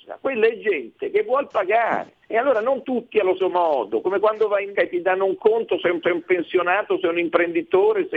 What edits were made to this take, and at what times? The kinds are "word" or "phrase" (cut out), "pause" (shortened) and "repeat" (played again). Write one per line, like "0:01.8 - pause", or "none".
0:02.2 - pause
0:02.8 - word
0:03.4 - word
0:04.7 - word
0:06.0 - repeat